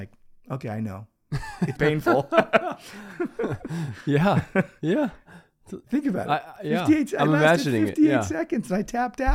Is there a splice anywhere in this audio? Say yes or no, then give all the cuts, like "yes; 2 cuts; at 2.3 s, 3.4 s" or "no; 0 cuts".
yes; 2 cuts; at 1.7 s, 5.8 s